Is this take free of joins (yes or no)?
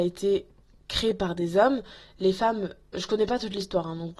yes